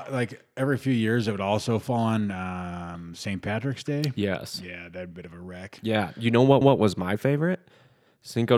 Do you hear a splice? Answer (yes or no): yes